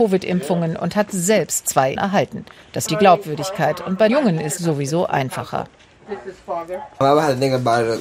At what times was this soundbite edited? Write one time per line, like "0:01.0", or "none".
0:01.6
0:02.0
0:02.9
0:04.1
0:04.6